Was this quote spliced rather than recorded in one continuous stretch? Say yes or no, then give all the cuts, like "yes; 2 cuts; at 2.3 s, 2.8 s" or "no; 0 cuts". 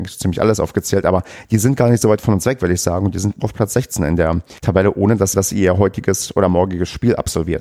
yes; 3 cuts; at 3.4 s, 4.6 s, 5.3 s